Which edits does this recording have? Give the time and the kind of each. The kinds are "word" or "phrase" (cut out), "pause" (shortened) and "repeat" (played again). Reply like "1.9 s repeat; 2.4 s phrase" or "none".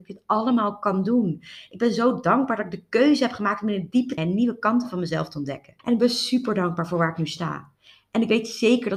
4.2 s word; 5.8 s pause